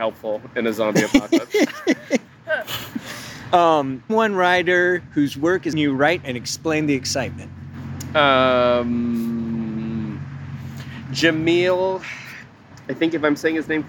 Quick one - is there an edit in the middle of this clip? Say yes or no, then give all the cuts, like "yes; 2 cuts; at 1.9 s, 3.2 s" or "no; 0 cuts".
yes; 4 cuts; at 4.1 s, 5.7 s, 6.2 s, 12.7 s